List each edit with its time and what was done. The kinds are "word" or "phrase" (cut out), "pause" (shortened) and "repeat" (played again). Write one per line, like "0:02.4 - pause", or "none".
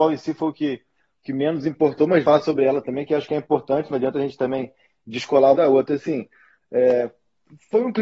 0:02.2 - word
0:05.5 - phrase